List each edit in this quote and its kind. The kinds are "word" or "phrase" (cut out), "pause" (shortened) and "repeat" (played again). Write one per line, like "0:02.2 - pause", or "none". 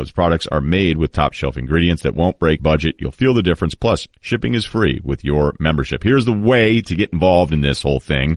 0:02.6 - word